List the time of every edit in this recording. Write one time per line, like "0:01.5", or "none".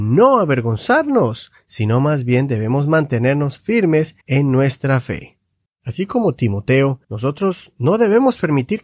0:04.2
0:05.7
0:07.0